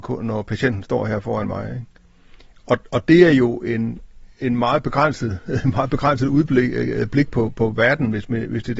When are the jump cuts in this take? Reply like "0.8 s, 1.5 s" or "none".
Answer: none